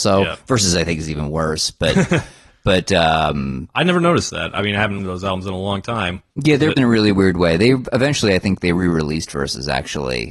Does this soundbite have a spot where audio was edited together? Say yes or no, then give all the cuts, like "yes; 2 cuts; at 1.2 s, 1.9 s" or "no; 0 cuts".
yes; 3 cuts; at 5.0 s, 6.3 s, 6.8 s